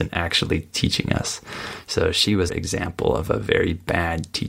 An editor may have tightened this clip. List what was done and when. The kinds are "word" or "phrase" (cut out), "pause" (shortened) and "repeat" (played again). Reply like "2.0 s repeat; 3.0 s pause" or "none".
2.5 s word